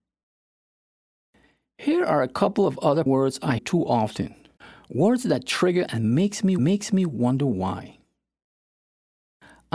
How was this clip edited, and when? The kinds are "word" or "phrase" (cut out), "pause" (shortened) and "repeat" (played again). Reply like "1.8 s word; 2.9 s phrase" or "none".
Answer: 3.1 s word; 3.6 s word; 4.6 s pause; 5.9 s word; 6.6 s repeat